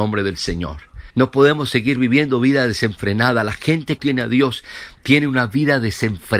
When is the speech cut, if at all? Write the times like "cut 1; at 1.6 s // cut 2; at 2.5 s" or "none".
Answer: cut 1; at 1.1 s // cut 2; at 4.0 s